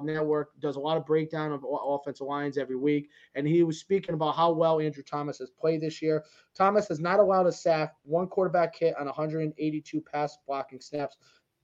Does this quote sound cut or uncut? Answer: uncut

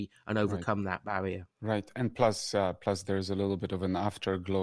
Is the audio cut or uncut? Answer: cut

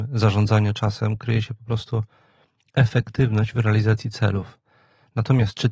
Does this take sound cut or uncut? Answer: uncut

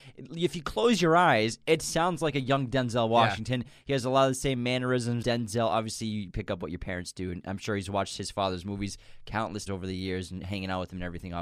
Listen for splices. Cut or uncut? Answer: cut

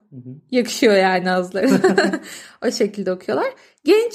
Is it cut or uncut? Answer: uncut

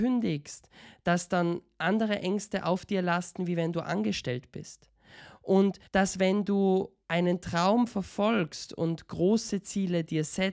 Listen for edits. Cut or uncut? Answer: cut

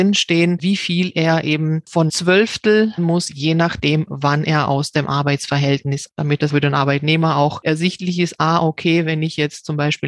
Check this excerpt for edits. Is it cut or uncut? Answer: cut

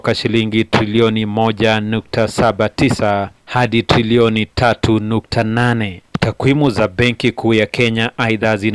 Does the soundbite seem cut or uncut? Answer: cut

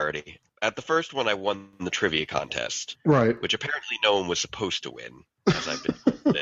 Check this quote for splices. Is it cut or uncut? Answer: uncut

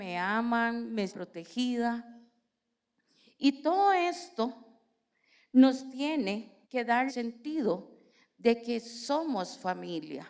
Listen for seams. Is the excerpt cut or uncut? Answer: cut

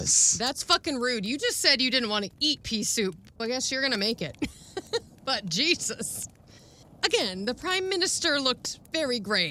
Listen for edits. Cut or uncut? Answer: cut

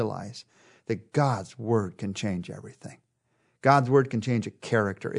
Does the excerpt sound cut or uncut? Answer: uncut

